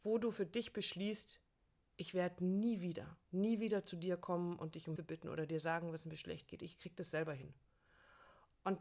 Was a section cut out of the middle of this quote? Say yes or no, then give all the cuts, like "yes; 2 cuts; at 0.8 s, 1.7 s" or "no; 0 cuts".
yes; 2 cuts; at 3.2 s, 5.0 s